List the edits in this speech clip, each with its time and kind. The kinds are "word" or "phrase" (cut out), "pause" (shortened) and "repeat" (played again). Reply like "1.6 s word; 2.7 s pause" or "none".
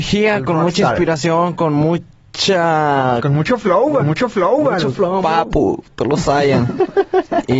4.0 s repeat; 5.2 s phrase